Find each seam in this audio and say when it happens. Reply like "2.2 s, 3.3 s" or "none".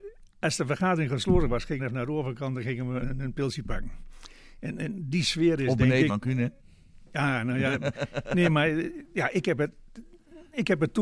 1.8 s, 3.0 s, 6.1 s